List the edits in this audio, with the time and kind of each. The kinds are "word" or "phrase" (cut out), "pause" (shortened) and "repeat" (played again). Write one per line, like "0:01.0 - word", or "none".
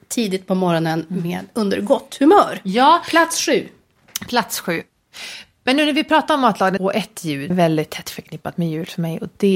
0:06.8 - phrase
0:07.5 - phrase